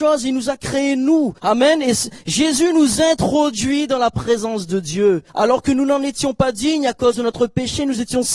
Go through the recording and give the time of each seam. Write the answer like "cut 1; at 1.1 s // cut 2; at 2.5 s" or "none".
cut 1; at 1.4 s // cut 2; at 5.3 s